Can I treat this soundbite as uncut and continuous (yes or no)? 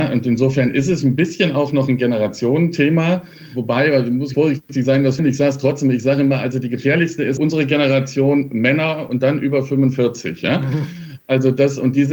no